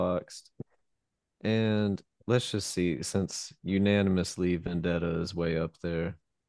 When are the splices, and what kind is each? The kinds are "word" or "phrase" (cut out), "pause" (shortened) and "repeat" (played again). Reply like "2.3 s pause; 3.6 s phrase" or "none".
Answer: none